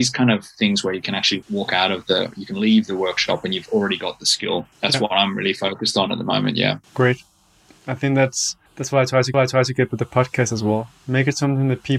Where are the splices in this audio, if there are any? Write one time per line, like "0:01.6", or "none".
0:01.4
0:04.7
0:06.8
0:08.7
0:09.3